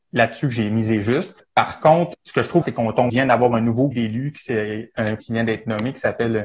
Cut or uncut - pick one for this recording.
cut